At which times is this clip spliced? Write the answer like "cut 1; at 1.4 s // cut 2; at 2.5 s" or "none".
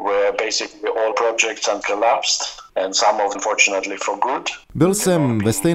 cut 1; at 1.1 s // cut 2; at 1.8 s // cut 3; at 2.7 s // cut 4; at 3.3 s // cut 5; at 4.6 s